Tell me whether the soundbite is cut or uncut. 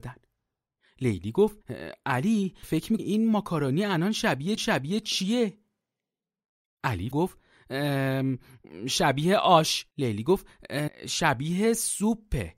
cut